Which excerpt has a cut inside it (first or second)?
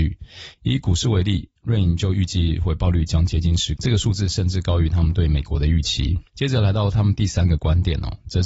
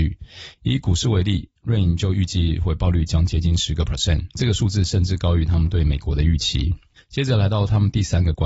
first